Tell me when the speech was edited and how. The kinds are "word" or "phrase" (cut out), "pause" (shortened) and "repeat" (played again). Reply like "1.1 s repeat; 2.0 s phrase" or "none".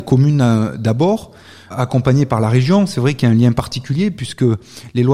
1.7 s word